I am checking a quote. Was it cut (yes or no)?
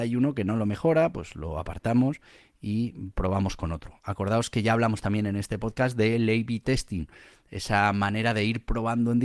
no